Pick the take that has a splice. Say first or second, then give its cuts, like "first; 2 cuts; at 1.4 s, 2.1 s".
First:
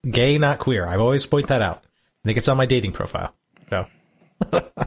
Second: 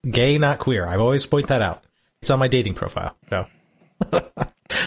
second; 2 cuts; at 2.2 s, 3.2 s